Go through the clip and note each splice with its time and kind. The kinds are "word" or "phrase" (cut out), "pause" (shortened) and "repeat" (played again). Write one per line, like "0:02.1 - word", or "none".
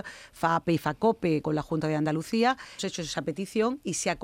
0:01.4 - word
0:02.8 - word